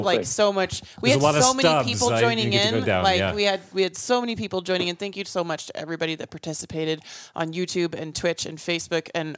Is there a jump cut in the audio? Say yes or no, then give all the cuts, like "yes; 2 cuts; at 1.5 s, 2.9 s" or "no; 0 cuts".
no; 0 cuts